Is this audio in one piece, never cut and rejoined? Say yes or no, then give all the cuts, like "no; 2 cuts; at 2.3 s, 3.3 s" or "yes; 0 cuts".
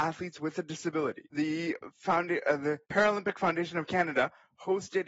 no; 2 cuts; at 1.3 s, 2.8 s